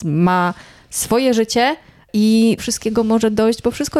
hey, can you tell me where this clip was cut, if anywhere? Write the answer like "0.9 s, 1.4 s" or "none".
2.6 s